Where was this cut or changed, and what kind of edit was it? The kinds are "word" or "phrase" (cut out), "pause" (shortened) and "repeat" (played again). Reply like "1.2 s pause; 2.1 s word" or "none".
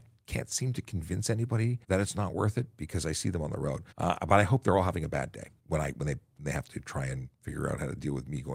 1.8 s pause; 3.9 s pause; 5.6 s pause; 7.3 s pause